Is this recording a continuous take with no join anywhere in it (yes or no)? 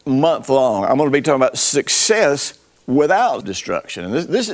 no